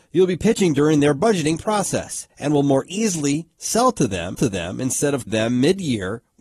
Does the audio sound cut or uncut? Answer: cut